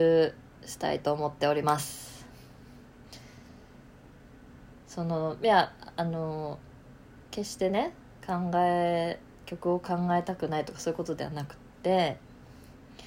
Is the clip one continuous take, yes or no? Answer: no